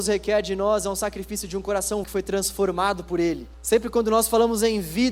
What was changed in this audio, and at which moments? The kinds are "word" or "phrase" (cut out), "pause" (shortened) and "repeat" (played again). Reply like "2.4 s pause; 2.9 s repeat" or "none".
2.0 s word; 3.5 s pause